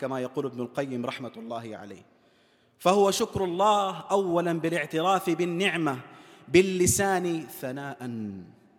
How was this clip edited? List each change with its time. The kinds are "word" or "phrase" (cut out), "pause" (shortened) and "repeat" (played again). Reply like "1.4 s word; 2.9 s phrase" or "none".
none